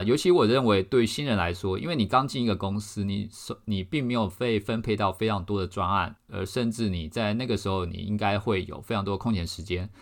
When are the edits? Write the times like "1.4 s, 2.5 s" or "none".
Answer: 6.2 s